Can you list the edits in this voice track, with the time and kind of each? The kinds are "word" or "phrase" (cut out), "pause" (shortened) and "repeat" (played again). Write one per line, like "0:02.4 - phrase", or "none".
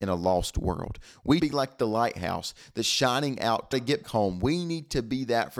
0:01.4 - word
0:03.7 - phrase
0:04.0 - word